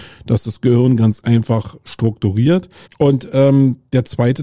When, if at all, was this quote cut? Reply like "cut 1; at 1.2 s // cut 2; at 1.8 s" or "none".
cut 1; at 2.8 s

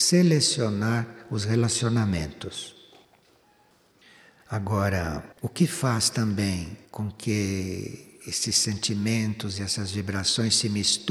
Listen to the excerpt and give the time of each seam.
cut 1; at 5.3 s // cut 2; at 6.8 s

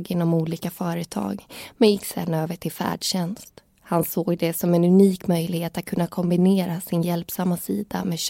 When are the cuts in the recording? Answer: none

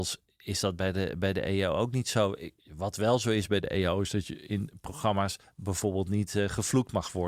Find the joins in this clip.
cut 1; at 5.4 s

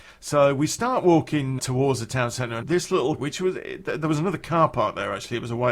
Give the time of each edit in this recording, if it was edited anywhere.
cut 1; at 1.6 s // cut 2; at 2.6 s // cut 3; at 3.2 s

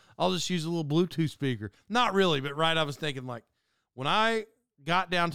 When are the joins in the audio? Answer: none

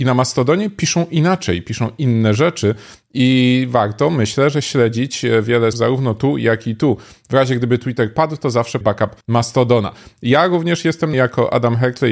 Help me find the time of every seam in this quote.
cut 1; at 5.7 s // cut 2; at 8.8 s // cut 3; at 9.2 s // cut 4; at 11.1 s

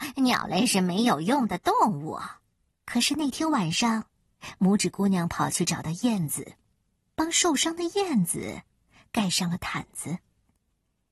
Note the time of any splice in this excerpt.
cut 1; at 2.7 s

